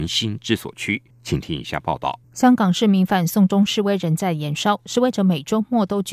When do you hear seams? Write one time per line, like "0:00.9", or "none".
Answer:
0:01.1
0:02.2